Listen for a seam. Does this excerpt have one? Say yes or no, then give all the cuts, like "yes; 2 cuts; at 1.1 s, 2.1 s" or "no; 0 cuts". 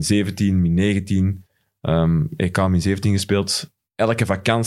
no; 0 cuts